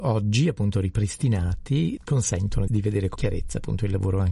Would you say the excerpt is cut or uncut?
cut